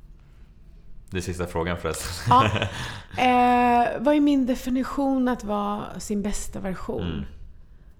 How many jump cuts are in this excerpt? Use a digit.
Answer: 1